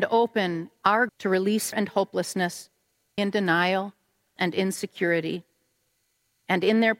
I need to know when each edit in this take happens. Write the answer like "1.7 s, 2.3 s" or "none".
1.1 s, 1.7 s, 3.2 s, 4.4 s